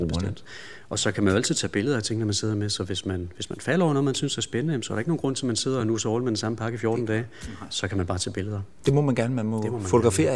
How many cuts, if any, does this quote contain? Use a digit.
0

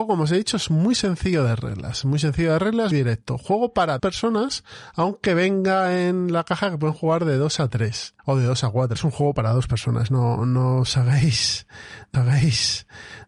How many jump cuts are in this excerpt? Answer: 5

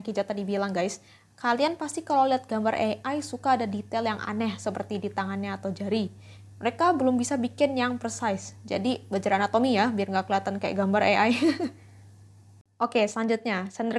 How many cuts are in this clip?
0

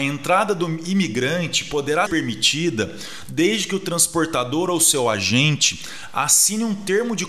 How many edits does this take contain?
1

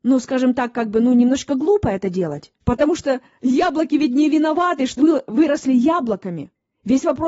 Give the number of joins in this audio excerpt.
2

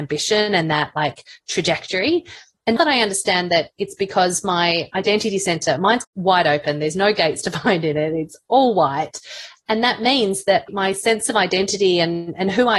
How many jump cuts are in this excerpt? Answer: 2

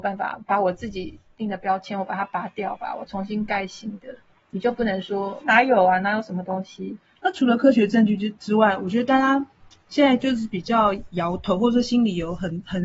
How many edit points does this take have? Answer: 1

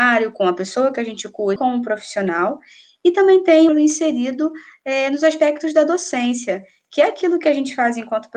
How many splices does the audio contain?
2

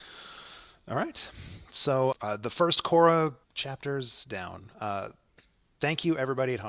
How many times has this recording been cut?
2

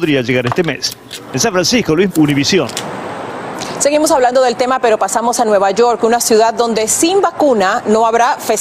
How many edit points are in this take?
1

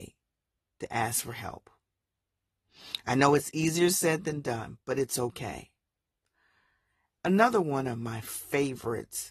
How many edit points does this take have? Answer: 0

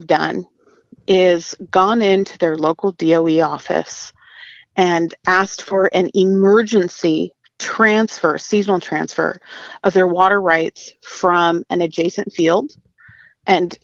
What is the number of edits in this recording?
0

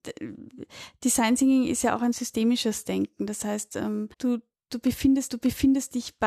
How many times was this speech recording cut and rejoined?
2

